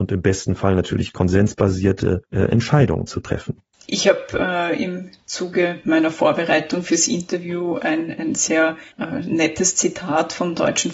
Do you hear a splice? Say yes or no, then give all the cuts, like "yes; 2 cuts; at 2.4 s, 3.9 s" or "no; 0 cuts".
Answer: yes; 3 cuts; at 2.2 s, 3.7 s, 8.9 s